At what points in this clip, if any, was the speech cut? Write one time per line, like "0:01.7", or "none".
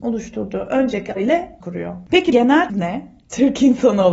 0:01.2
0:01.6
0:02.3
0:02.7